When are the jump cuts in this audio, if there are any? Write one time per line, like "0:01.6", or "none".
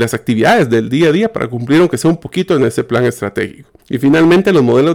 0:03.8